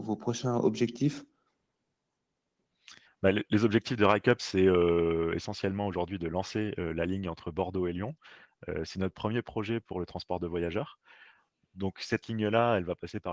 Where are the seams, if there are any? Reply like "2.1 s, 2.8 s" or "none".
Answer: 3.0 s